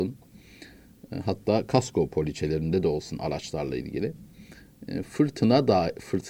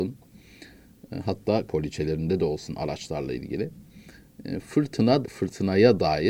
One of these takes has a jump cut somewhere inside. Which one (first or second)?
second